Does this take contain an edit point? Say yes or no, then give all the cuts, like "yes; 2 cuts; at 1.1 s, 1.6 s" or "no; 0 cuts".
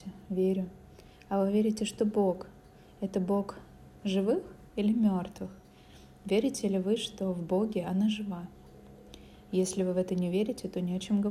no; 0 cuts